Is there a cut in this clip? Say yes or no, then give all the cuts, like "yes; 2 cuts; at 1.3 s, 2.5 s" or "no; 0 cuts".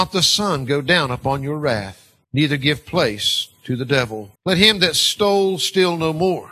yes; 2 cuts; at 2.2 s, 4.4 s